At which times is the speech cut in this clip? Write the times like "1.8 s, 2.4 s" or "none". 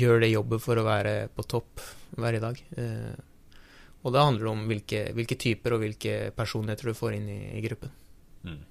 none